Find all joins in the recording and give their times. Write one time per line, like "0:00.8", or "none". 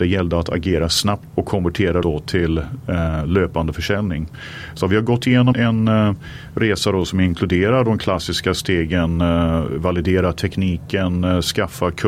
0:01.3
0:02.0
0:05.5